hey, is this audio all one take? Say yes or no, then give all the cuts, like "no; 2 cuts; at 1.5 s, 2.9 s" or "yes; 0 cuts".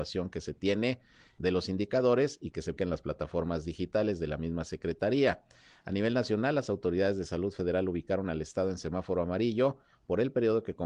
no; 2 cuts; at 1.4 s, 2.8 s